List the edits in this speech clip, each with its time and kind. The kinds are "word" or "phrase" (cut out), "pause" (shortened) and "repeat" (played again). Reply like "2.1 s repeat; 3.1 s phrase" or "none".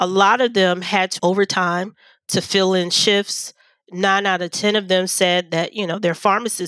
1.2 s word